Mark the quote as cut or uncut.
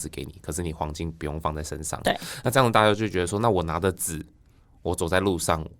uncut